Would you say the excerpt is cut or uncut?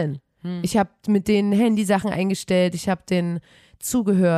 uncut